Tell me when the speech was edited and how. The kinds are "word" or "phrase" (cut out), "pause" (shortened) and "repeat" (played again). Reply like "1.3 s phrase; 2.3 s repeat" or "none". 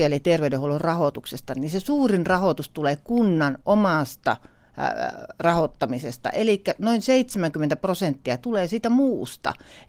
none